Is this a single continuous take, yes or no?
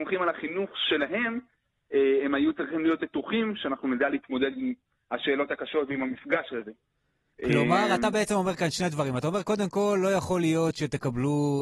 yes